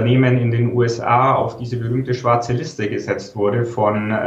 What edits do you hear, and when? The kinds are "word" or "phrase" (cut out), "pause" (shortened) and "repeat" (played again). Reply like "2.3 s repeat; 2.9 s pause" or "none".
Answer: none